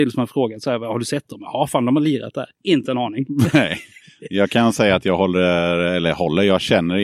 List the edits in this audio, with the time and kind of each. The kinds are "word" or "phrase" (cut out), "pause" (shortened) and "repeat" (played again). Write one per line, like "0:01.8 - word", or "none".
0:02.5 - pause